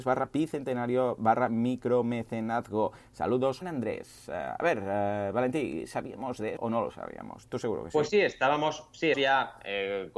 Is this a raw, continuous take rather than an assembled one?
no; 3 cuts; at 3.6 s, 6.6 s, 9.1 s

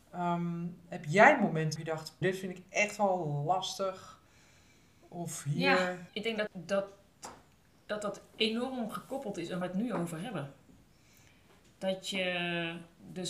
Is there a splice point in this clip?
yes; 5 cuts; at 1.8 s, 2.2 s, 6.1 s, 6.5 s, 9.6 s

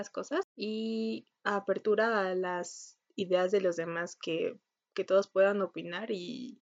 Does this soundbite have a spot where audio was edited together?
no; 0 cuts

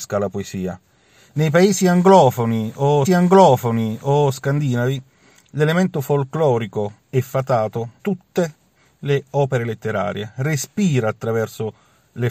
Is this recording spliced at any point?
yes; 3 cuts; at 3.0 s, 7.0 s, 8.0 s

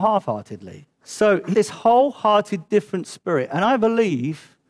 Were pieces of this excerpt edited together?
yes; 2 cuts; at 0.9 s, 1.5 s

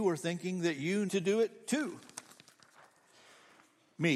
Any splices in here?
yes; 1 cut; at 1.1 s

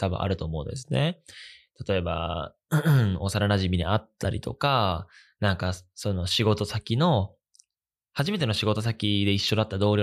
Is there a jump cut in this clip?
no; 0 cuts

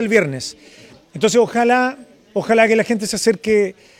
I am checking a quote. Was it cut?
no; 0 cuts

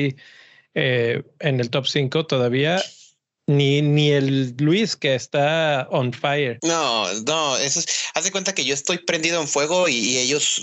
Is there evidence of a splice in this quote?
no; 0 cuts

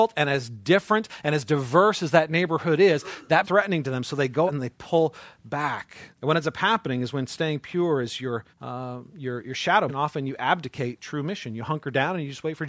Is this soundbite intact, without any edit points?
no; 5 cuts; at 3.4 s, 4.5 s, 6.1 s, 8.5 s, 9.9 s

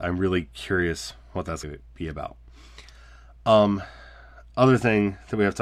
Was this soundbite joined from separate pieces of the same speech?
yes; 1 cut; at 1.6 s

